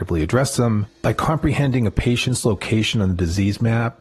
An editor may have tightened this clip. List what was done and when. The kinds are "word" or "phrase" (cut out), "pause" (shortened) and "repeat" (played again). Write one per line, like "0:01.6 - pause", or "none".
none